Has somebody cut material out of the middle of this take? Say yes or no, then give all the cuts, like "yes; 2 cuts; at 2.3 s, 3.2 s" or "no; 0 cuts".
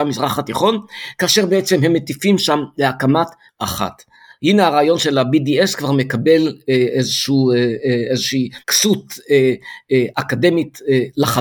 yes; 2 cuts; at 3.5 s, 8.6 s